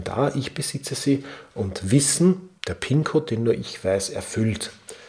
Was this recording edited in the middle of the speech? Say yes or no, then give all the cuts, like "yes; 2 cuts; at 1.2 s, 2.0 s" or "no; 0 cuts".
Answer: yes; 1 cut; at 2.6 s